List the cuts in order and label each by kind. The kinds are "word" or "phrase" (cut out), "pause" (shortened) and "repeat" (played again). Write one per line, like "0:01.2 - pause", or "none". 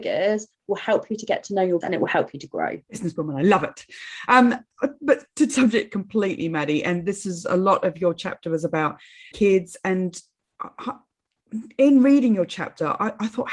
0:01.8 - word
0:02.8 - pause
0:05.5 - phrase
0:09.3 - phrase